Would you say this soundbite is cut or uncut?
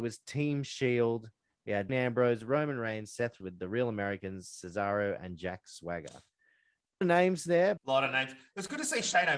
cut